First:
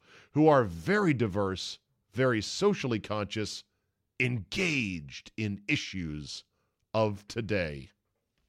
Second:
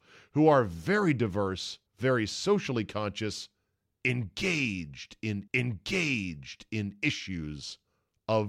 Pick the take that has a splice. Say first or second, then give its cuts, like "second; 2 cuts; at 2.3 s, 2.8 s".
second; 2 cuts; at 1.9 s, 5.5 s